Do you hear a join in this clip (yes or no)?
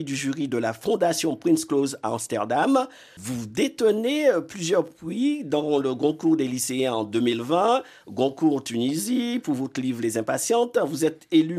no